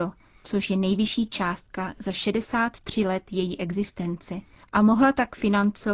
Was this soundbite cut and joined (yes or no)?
no